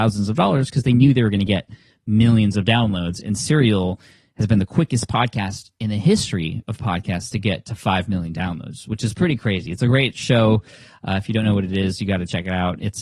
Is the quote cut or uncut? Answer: uncut